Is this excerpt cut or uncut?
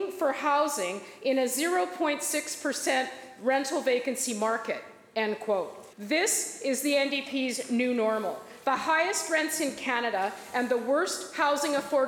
cut